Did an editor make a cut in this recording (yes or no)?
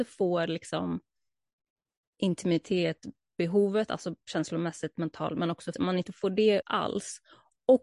yes